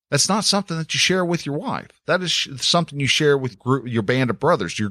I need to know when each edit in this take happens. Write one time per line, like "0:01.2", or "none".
0:03.5